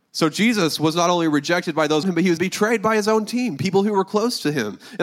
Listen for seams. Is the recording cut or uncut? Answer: cut